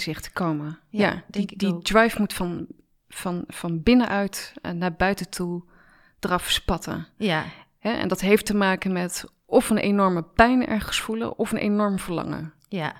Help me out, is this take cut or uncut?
uncut